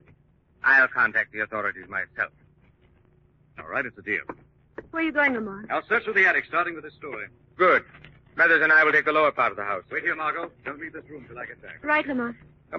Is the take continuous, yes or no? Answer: yes